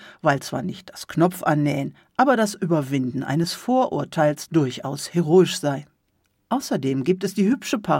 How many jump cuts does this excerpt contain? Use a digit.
0